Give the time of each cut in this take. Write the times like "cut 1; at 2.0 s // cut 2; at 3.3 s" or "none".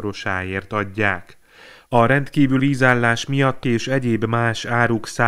cut 1; at 2.6 s // cut 2; at 3.6 s